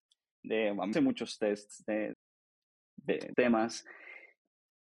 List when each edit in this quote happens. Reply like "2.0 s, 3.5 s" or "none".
0.9 s, 2.1 s, 3.3 s